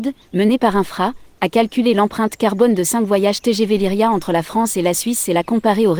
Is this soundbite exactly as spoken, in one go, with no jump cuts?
yes; 0 cuts

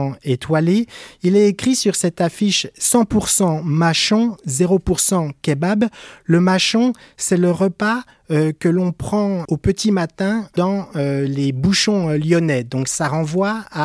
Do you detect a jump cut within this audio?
yes; 1 cut; at 9.4 s

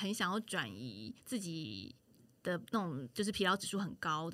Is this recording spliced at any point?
yes; 2 cuts; at 1.2 s, 2.7 s

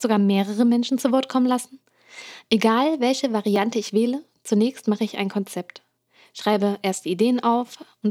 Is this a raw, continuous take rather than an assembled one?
yes; 0 cuts

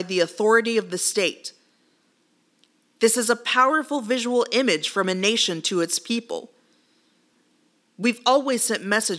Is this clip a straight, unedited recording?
yes; 0 cuts

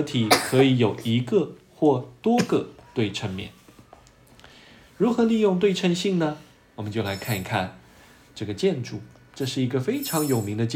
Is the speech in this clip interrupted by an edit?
no; 0 cuts

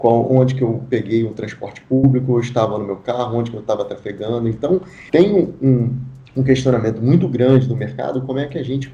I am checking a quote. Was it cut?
yes; 2 cuts; at 5.1 s, 6.3 s

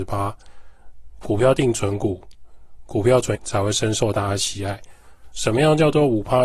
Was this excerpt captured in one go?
no; 1 cut; at 3.3 s

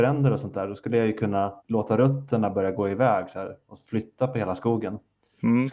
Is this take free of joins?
no; 1 cut; at 1.6 s

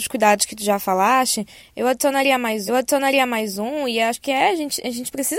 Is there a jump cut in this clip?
yes; 1 cut; at 2.7 s

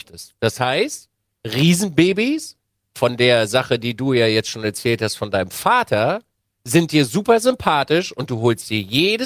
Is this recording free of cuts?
yes; 0 cuts

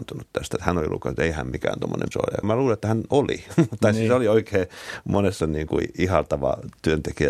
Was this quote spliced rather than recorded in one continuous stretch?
yes; 3 cuts; at 2.1 s, 2.4 s, 5.4 s

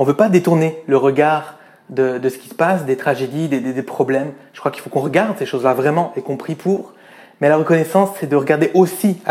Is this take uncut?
yes; 0 cuts

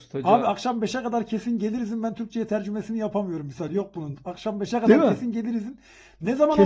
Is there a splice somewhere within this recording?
no; 0 cuts

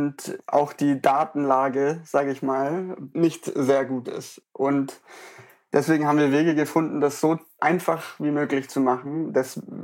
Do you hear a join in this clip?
no; 0 cuts

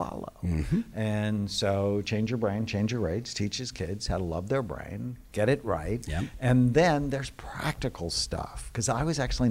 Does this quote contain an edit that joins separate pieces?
no; 0 cuts

